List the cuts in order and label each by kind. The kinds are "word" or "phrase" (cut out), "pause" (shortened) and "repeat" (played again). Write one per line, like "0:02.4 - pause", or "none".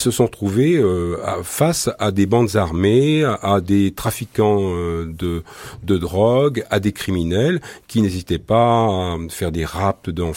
none